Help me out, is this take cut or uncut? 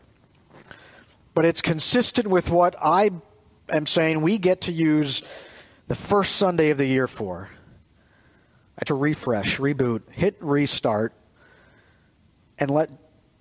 cut